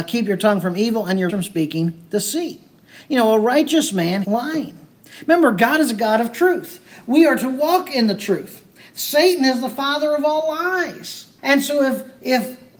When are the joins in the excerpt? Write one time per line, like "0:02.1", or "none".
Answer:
0:01.3
0:04.2
0:11.4